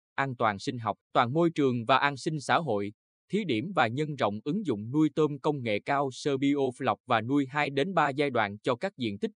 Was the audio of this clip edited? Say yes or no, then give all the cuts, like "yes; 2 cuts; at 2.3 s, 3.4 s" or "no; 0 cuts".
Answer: yes; 2 cuts; at 1.1 s, 6.4 s